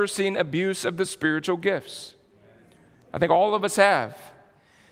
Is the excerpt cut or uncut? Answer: uncut